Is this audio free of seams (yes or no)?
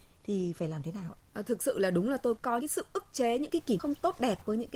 no